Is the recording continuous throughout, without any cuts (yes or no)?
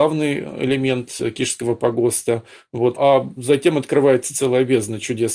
no